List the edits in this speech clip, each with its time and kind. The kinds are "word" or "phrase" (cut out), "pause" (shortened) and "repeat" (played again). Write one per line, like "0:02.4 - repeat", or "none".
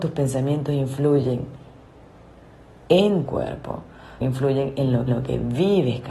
0:03.3 - word
0:04.2 - word
0:05.1 - repeat